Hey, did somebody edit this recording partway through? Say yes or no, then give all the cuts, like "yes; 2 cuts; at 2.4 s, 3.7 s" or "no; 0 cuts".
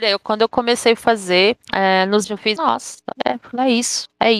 yes; 3 cuts; at 1.6 s, 2.2 s, 2.6 s